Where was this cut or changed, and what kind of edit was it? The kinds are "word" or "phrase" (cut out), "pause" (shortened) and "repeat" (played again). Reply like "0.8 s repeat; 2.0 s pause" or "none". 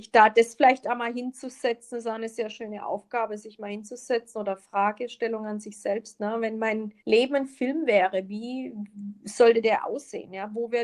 7.0 s pause